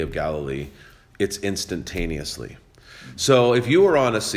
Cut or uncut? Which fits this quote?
uncut